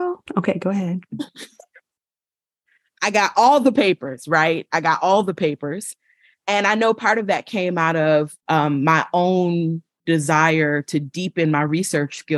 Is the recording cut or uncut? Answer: cut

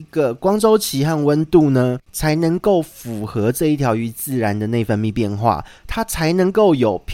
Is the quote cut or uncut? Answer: cut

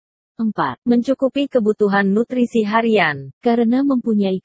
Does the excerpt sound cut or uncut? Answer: uncut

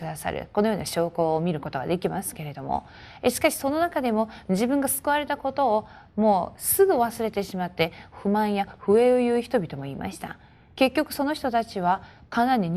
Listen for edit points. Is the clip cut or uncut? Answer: uncut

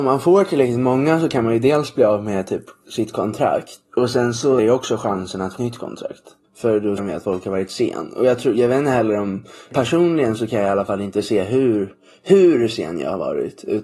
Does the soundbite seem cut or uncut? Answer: cut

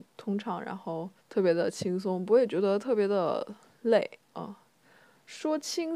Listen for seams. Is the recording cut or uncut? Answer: cut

